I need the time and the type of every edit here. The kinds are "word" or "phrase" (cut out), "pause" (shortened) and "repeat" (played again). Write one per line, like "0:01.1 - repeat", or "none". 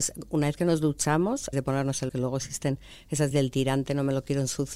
0:01.5 - word
0:02.1 - word
0:03.3 - word